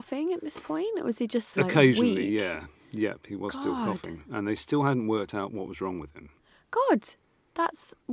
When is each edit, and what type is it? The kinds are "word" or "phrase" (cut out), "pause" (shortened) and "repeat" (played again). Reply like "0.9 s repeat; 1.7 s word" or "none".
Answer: 1.6 s word